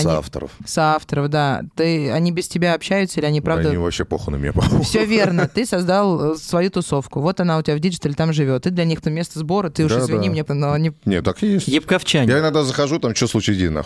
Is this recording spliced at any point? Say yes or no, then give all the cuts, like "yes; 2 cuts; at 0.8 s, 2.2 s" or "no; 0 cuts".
yes; 2 cuts; at 9.0 s, 10.5 s